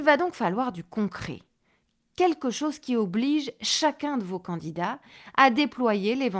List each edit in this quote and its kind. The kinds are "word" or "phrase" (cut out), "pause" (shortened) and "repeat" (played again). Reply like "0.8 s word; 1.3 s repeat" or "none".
none